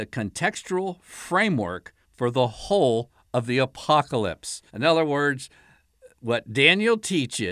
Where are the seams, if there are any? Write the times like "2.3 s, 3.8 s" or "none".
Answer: 2.0 s, 4.7 s